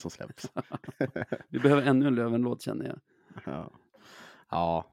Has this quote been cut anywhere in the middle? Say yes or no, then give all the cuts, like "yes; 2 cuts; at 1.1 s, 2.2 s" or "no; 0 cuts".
no; 0 cuts